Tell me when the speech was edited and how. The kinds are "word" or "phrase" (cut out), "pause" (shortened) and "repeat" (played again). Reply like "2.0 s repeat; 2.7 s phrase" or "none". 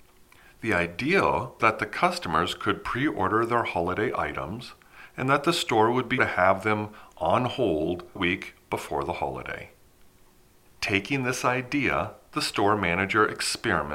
1.6 s word; 6.2 s word; 8.2 s word